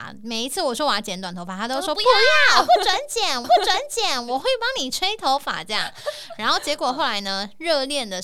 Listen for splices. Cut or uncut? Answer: cut